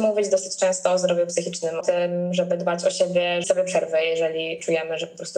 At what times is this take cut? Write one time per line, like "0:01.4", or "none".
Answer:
0:01.8
0:03.4